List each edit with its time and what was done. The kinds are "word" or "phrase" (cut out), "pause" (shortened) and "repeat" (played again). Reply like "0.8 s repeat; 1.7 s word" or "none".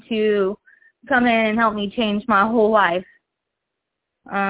none